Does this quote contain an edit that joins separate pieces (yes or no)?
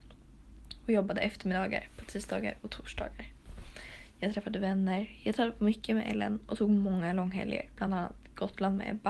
no